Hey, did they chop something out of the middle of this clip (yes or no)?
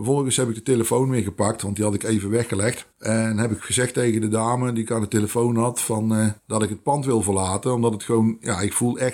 yes